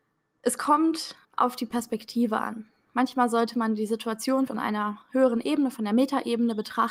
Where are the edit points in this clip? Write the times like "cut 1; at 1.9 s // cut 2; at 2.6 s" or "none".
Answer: cut 1; at 1.2 s // cut 2; at 4.5 s

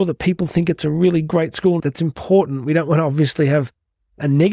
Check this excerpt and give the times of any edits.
cut 1; at 1.8 s

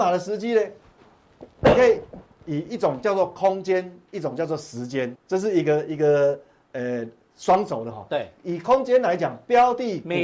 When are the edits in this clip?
cut 1; at 5.1 s // cut 2; at 8.4 s

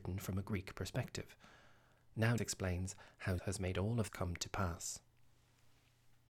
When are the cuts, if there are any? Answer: cut 1; at 2.4 s // cut 2; at 3.4 s // cut 3; at 4.1 s

